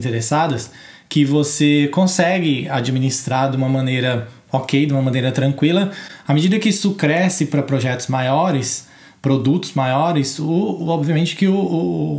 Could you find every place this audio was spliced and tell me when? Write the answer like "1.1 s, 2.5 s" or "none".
none